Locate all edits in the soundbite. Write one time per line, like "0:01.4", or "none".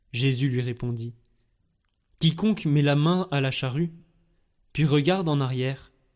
none